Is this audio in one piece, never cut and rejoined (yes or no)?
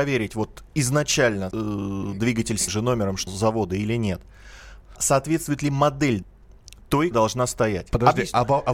no